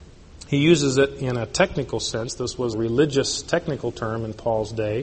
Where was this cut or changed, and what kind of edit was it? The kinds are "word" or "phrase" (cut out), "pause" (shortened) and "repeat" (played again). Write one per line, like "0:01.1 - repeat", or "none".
0:02.7 - word